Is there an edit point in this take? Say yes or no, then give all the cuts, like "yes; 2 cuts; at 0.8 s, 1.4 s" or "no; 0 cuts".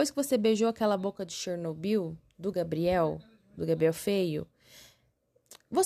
no; 0 cuts